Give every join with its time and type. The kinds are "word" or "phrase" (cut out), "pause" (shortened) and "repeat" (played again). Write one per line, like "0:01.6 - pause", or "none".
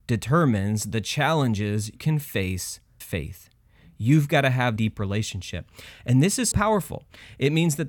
0:02.0 - word
0:03.0 - word
0:04.8 - word
0:06.5 - word